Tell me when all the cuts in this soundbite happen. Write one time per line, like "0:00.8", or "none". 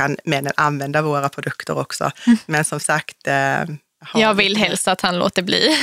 none

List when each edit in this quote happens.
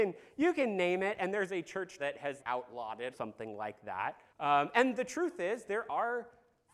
0:02.0
0:02.4
0:03.1
0:04.3

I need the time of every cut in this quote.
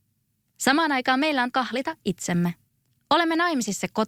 0:01.5

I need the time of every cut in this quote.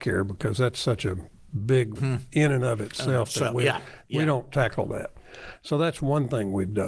0:02.0

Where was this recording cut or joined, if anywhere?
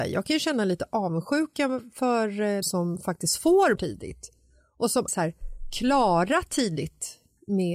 0:02.6
0:03.7
0:05.1

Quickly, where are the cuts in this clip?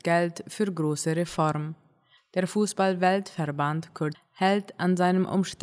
0:04.1

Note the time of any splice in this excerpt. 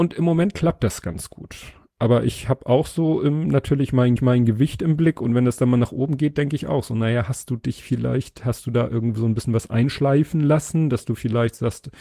0:04.2

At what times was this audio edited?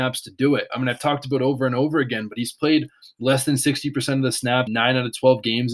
0:04.7

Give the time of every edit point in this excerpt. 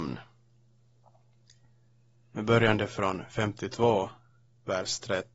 none

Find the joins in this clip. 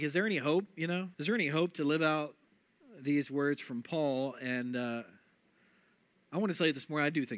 0:01.1
0:02.5

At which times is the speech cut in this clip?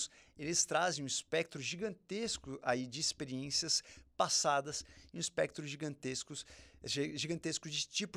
none

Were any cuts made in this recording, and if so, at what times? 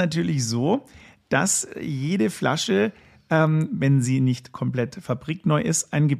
none

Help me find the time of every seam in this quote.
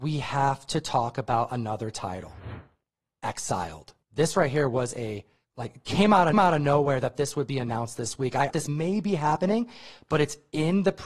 0:04.0
0:05.4
0:06.3
0:08.5

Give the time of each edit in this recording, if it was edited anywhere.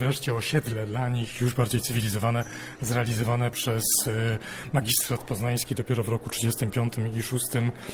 none

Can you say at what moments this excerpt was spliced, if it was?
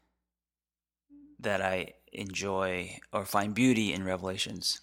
none

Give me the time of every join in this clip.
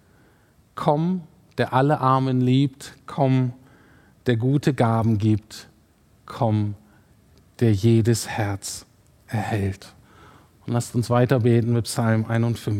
none

